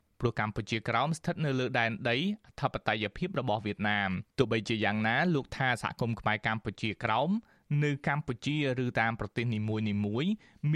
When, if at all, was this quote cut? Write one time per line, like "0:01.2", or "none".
0:04.3